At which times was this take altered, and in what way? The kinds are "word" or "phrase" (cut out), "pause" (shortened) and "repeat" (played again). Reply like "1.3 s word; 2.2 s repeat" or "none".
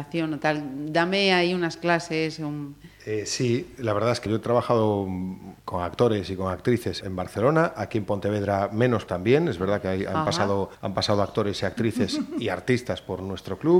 4.3 s word; 5.6 s pause; 7.0 s word; 9.1 s word; 10.7 s pause